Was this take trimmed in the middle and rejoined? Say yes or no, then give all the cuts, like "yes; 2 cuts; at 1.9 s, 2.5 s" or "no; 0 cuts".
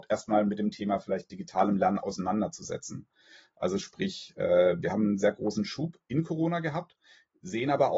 no; 0 cuts